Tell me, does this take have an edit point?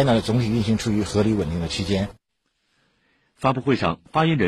no; 0 cuts

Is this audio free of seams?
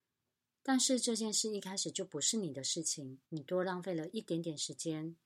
no; 1 cut; at 3.2 s

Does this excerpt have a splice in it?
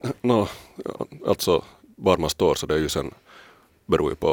no; 0 cuts

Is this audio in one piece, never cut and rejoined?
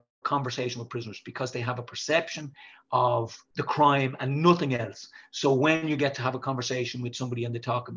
no; 1 cut; at 3.4 s

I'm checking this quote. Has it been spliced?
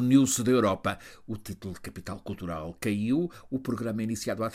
no; 0 cuts

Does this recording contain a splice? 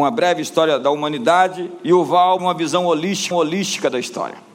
yes; 2 cuts; at 2.4 s, 3.3 s

